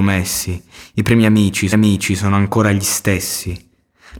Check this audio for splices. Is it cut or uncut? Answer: cut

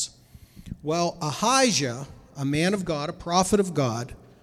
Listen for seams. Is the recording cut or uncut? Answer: uncut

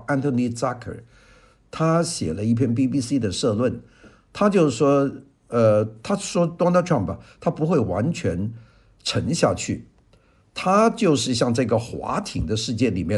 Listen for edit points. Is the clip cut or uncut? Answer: uncut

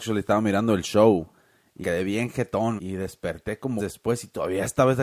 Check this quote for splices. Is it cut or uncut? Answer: cut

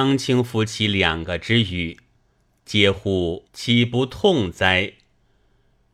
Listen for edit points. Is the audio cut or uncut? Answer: cut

